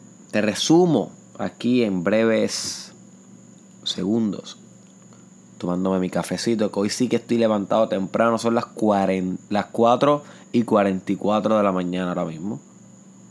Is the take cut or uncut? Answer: uncut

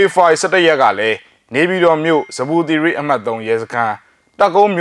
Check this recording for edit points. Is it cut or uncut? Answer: uncut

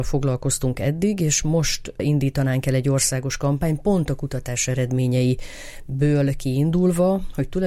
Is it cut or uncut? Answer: uncut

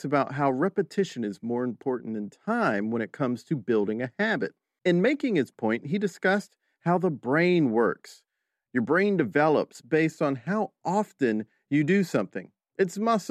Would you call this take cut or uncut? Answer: uncut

